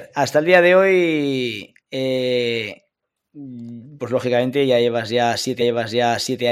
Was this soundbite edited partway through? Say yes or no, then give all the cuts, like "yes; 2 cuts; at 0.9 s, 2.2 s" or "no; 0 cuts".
yes; 2 cuts; at 1.8 s, 5.6 s